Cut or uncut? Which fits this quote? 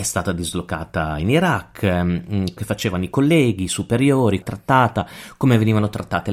cut